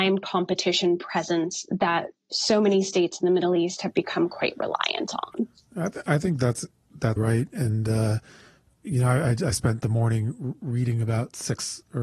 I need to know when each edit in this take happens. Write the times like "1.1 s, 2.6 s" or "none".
7.2 s